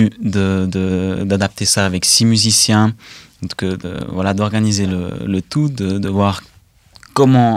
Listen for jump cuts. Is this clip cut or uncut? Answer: uncut